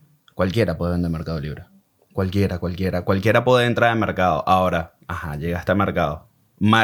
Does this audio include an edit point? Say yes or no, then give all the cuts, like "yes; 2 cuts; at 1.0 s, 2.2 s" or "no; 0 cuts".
no; 0 cuts